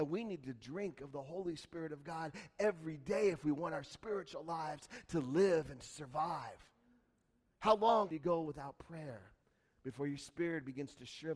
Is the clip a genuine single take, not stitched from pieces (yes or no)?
yes